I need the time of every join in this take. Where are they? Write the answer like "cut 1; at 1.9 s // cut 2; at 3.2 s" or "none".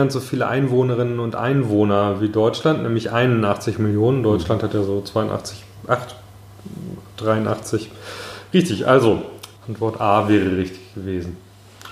cut 1; at 9.6 s